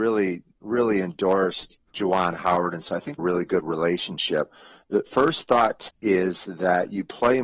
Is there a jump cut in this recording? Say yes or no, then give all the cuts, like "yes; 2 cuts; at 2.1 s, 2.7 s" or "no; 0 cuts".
yes; 4 cuts; at 1.9 s, 3.2 s, 5.1 s, 5.9 s